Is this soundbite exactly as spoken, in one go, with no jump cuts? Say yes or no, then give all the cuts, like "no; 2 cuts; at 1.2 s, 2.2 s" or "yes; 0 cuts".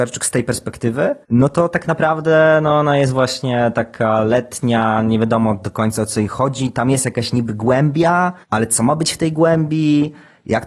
no; 2 cuts; at 1.2 s, 8.4 s